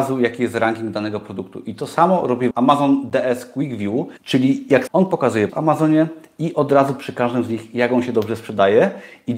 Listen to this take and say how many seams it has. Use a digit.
4